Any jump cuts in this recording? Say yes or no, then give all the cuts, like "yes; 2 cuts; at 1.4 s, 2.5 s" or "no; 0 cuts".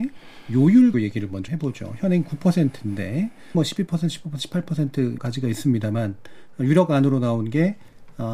yes; 4 cuts; at 0.9 s, 1.5 s, 3.5 s, 5.2 s